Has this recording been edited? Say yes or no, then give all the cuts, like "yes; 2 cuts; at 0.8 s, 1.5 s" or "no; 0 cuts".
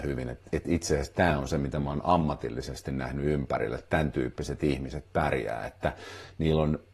no; 0 cuts